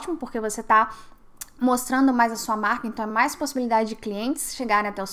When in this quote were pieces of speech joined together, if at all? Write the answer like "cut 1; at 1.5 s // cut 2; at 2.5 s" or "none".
none